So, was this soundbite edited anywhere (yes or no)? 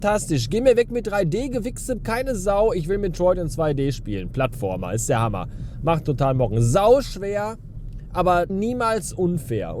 yes